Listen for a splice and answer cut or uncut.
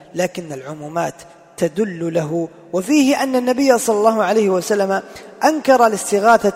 uncut